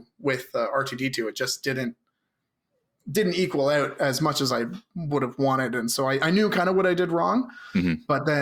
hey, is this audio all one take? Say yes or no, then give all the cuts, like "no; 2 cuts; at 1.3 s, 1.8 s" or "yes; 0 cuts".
yes; 0 cuts